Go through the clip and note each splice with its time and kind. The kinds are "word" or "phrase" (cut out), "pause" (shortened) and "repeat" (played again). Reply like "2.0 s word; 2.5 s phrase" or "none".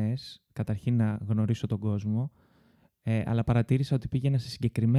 none